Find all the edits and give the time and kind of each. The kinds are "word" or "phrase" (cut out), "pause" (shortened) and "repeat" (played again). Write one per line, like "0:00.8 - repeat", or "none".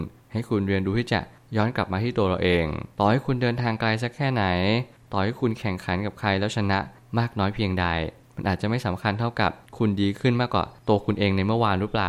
0:02.9 - pause